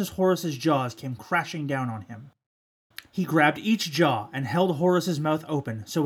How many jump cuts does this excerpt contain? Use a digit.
0